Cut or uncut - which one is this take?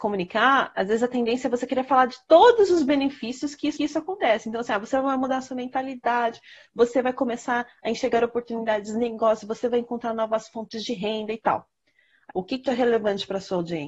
cut